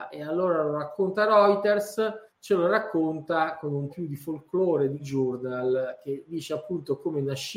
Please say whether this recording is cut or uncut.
cut